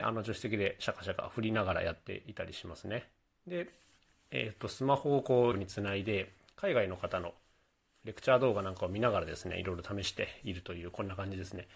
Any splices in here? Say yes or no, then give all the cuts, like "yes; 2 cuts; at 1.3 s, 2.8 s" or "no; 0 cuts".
yes; 1 cut; at 5.5 s